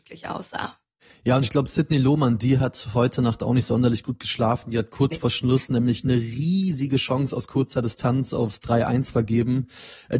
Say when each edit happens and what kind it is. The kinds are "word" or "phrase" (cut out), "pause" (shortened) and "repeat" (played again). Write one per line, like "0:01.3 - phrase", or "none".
none

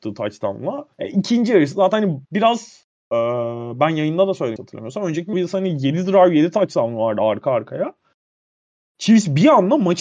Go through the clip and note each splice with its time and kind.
0:00.9 - pause
0:02.2 - pause
0:04.6 - word
0:05.3 - word

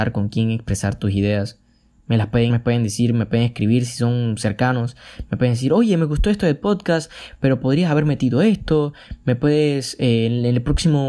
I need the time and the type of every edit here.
0:02.5 - word

